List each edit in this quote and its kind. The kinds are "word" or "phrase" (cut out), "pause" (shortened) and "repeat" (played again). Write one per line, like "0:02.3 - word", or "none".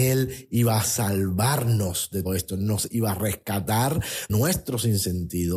0:02.2 - word
0:04.3 - word